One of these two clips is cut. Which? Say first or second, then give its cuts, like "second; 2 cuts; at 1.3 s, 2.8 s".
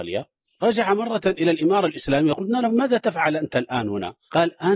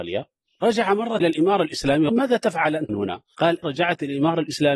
second; 4 cuts; at 1.2 s, 2.1 s, 2.9 s, 3.6 s